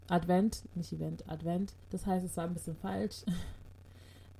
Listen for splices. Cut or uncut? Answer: cut